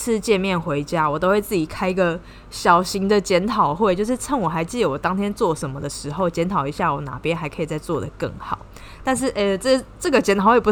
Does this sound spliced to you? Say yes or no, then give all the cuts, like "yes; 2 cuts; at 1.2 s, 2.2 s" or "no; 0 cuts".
no; 0 cuts